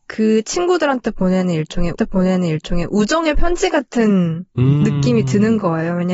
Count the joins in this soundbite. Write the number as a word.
one